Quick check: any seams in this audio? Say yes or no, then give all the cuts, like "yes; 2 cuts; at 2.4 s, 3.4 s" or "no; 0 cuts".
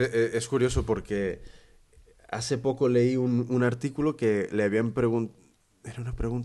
no; 0 cuts